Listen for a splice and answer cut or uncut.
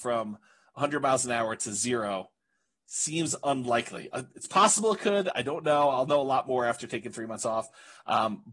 uncut